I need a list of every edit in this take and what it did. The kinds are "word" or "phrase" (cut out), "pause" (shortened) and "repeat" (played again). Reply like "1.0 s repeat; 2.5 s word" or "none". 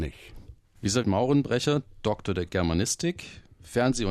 1.0 s phrase